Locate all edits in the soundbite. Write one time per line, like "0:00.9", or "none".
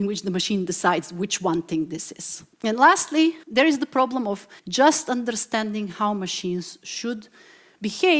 0:02.5
0:03.4
0:04.6